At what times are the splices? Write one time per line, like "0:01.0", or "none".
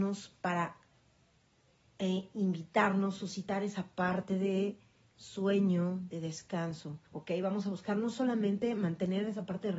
0:07.1